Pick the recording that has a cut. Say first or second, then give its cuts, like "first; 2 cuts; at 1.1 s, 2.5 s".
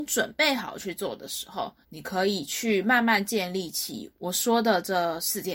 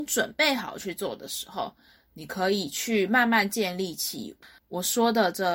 first; 2 cuts; at 1.8 s, 4.1 s